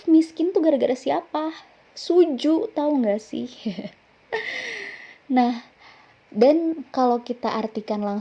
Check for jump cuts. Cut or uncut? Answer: uncut